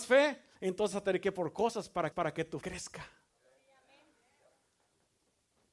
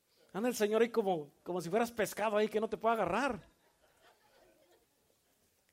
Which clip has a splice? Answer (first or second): first